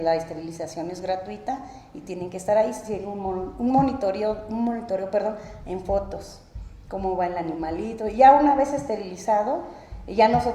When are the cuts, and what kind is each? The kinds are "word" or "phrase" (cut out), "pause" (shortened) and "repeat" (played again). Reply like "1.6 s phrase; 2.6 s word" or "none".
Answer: none

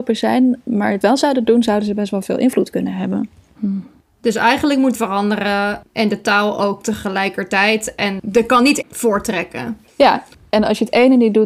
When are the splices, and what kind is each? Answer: 1.0 s phrase; 4.9 s phrase; 8.8 s word

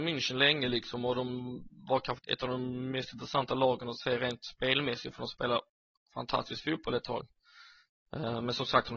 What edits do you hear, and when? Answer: 2.2 s word

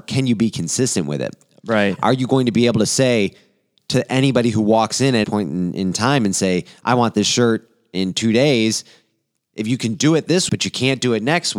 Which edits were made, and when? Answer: 5.2 s word; 10.5 s word

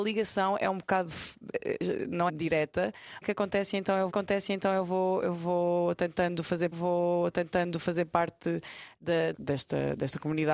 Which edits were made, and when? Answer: 2.3 s word; 3.2 s phrase; 4.1 s repeat; 6.7 s repeat; 9.3 s word

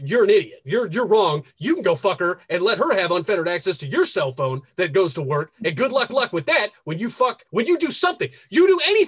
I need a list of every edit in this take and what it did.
6.1 s repeat; 7.5 s pause

